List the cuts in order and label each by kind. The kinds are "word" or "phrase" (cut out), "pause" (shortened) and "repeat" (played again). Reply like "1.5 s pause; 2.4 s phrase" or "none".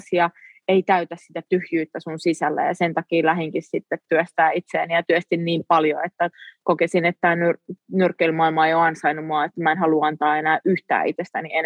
none